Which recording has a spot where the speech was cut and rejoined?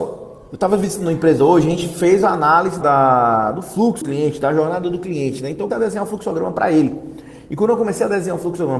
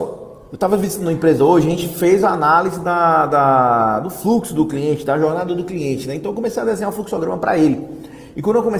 first; 3 cuts; at 2.8 s, 4.0 s, 5.7 s

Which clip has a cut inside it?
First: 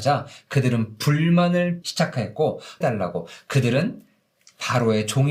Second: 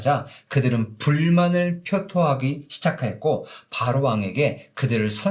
first; 2 cuts; at 1.8 s, 2.8 s

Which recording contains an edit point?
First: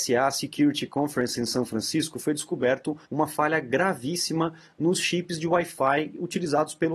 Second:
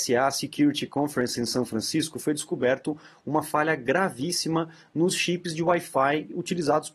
first; 1 cut; at 3.0 s

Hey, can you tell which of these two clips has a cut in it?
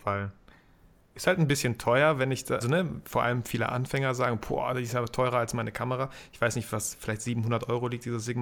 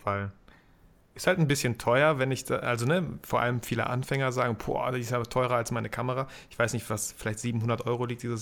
first; 1 cut; at 2.6 s

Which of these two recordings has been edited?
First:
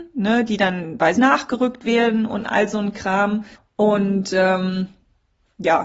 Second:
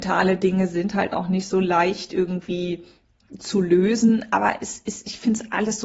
first; 2 cuts; at 1.1 s, 3.5 s

